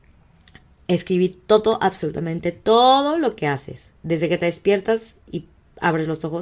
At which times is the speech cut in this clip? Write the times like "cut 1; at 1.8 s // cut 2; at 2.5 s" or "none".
cut 1; at 4.0 s